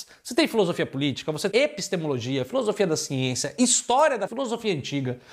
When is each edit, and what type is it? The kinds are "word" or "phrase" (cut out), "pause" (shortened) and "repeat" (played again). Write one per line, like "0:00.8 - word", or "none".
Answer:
0:01.5 - word
0:04.3 - word